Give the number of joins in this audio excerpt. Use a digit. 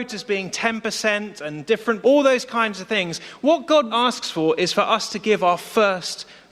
2